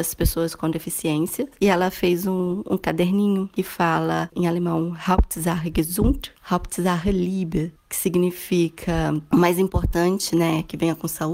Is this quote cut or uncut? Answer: uncut